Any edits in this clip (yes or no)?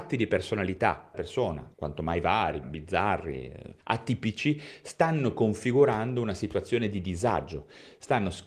yes